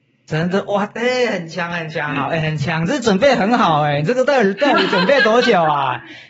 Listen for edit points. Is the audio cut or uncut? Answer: uncut